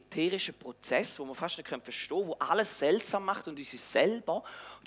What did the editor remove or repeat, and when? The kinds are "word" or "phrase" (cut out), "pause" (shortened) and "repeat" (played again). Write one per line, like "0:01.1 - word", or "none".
none